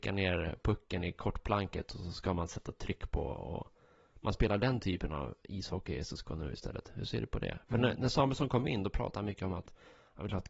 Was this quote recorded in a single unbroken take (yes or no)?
yes